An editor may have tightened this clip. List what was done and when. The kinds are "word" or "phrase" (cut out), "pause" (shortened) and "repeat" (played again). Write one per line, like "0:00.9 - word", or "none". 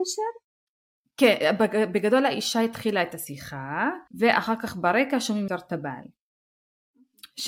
0:04.1 - pause
0:05.5 - word